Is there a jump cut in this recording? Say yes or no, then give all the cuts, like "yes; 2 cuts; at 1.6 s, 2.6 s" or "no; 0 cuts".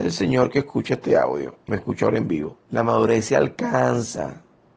yes; 2 cuts; at 1.7 s, 2.6 s